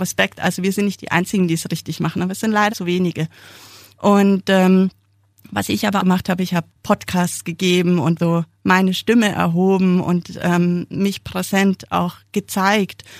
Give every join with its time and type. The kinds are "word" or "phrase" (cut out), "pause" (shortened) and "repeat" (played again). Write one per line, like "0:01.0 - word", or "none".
0:02.7 - word
0:06.0 - word
0:06.7 - word
0:08.2 - word